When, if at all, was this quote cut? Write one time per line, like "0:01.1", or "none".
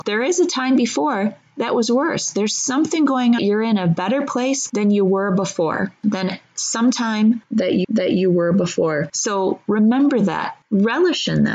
0:03.4
0:07.8